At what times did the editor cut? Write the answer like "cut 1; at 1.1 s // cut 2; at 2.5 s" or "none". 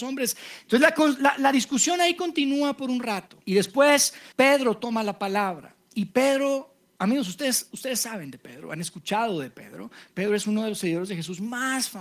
cut 1; at 3.4 s // cut 2; at 4.3 s